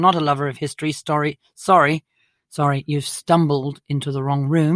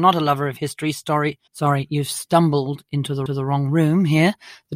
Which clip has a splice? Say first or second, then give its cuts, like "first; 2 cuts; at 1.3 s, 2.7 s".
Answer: second; 2 cuts; at 1.5 s, 3.3 s